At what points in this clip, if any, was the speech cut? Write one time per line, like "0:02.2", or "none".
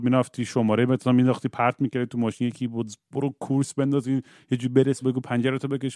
0:05.0

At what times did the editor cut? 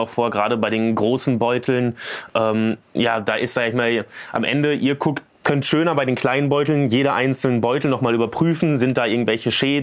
0:02.8

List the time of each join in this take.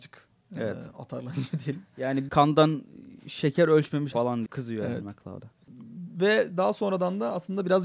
0:02.3
0:04.1
0:04.5

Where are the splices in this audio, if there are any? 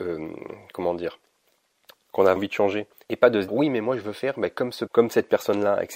0:02.4
0:03.5
0:04.9

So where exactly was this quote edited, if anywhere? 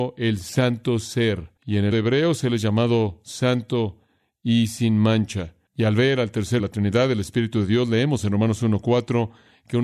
0:01.6
0:01.9
0:05.6
0:06.6

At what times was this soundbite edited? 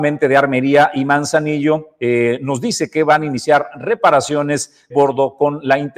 0:04.9

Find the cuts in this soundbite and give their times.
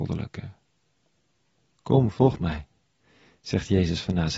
none

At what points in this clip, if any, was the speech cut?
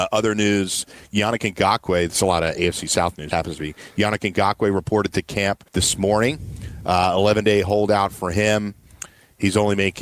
0:03.3
0:05.7

